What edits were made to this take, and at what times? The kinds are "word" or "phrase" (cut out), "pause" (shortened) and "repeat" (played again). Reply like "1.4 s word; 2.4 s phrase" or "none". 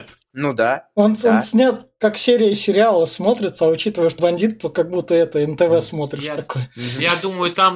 4.2 s word